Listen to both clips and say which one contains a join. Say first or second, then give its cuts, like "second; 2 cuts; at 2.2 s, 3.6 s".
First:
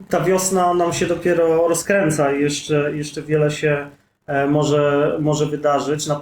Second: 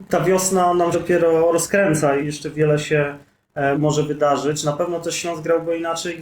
second; 3 cuts; at 0.9 s, 2.2 s, 3.7 s